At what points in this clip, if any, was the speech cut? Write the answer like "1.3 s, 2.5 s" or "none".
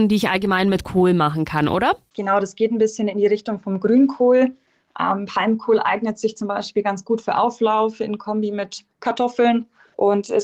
none